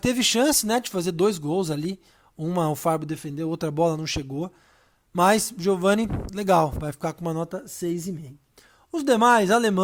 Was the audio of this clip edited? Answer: no; 0 cuts

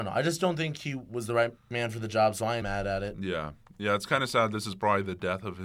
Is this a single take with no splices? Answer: no; 2 cuts; at 1.6 s, 2.6 s

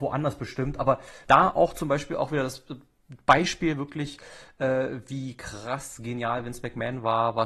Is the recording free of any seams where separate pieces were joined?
no; 1 cut; at 1.2 s

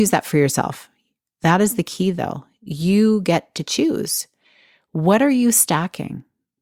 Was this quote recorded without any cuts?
yes; 0 cuts

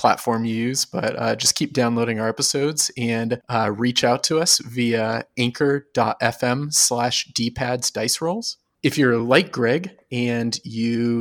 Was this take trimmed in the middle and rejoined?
no; 0 cuts

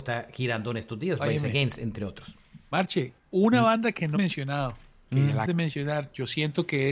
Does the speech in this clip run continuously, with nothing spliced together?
no; 2 cuts; at 4.2 s, 5.5 s

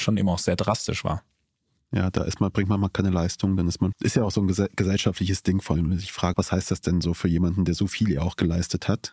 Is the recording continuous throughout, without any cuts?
no; 3 cuts; at 3.9 s, 5.8 s, 6.3 s

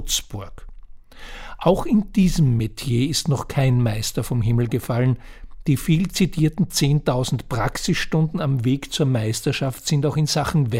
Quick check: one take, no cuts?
yes; 0 cuts

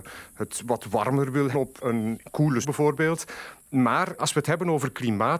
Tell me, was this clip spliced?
yes; 3 cuts; at 1.5 s, 2.6 s, 4.2 s

